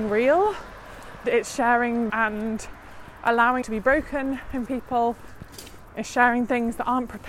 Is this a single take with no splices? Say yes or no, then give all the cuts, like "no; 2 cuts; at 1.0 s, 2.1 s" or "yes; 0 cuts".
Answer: no; 4 cuts; at 1.2 s, 2.1 s, 3.6 s, 4.7 s